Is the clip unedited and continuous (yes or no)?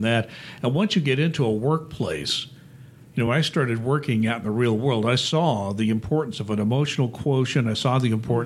yes